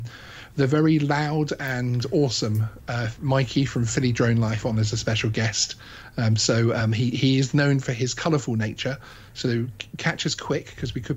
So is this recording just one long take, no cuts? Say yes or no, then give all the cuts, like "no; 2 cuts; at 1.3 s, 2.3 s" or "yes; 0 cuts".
yes; 0 cuts